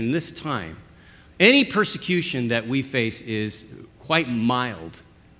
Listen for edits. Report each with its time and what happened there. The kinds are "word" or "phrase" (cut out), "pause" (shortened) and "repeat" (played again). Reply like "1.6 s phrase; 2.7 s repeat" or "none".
none